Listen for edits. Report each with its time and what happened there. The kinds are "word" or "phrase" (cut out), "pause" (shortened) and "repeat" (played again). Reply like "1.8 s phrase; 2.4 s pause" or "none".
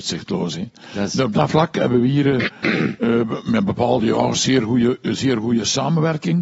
none